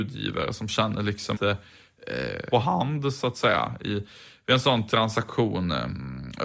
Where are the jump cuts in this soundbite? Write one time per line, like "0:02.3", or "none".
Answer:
0:01.3
0:02.5